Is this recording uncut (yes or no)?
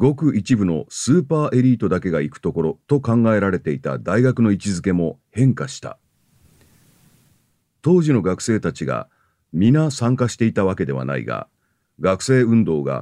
no